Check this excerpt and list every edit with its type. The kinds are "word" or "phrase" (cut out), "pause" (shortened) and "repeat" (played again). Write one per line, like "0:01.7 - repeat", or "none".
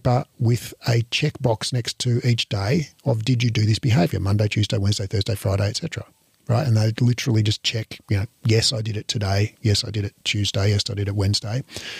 0:08.0 - pause
0:10.2 - pause